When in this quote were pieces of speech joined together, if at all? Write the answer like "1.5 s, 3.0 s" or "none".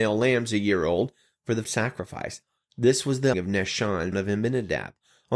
1.6 s, 3.3 s, 4.1 s